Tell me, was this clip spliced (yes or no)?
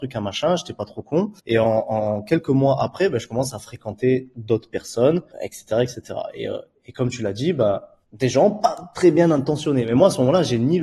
yes